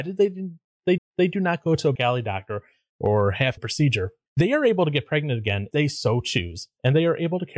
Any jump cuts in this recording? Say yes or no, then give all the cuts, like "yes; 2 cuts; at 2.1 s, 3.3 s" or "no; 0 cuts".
yes; 4 cuts; at 1.0 s, 1.9 s, 3.6 s, 5.7 s